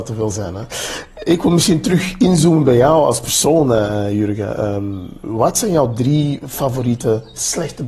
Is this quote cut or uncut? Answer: uncut